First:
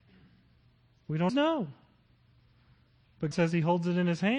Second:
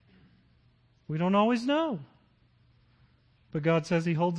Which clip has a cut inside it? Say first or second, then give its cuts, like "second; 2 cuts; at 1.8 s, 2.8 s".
first; 2 cuts; at 1.3 s, 3.3 s